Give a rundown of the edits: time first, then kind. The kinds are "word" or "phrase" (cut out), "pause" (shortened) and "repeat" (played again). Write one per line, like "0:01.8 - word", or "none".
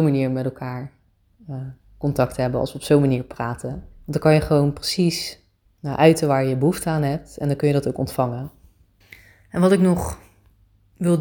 0:03.9 - pause
0:05.6 - pause
0:09.0 - pause